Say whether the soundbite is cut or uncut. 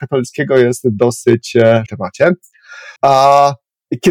cut